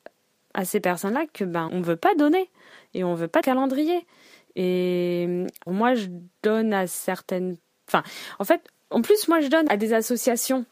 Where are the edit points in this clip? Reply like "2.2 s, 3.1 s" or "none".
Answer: 1.7 s, 3.4 s, 5.7 s, 9.7 s